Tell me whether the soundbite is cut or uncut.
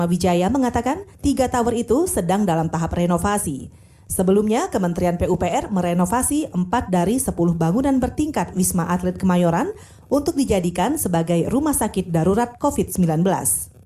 cut